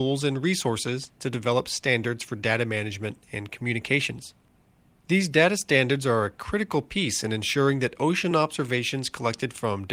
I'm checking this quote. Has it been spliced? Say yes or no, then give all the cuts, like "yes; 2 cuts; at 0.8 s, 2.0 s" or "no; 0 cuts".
no; 0 cuts